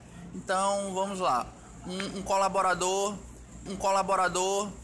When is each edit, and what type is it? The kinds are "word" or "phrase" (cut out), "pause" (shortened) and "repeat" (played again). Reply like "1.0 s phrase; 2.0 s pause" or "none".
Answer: 3.7 s repeat